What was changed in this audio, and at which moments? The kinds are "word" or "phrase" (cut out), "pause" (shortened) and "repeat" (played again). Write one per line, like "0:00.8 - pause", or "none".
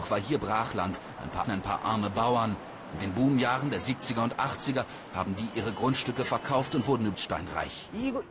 0:01.4 - word
0:07.1 - word